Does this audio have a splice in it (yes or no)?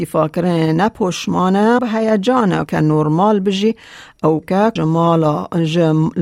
yes